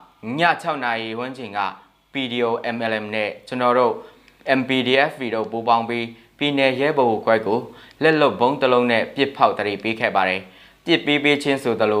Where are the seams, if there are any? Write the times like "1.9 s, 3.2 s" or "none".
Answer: none